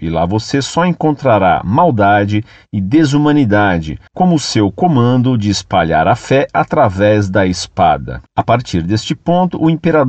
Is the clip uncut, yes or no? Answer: no